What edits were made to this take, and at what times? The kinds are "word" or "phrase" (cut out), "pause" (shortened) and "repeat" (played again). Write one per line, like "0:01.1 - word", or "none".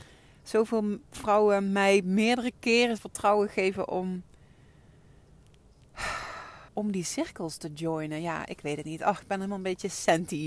0:03.0 - word
0:06.7 - pause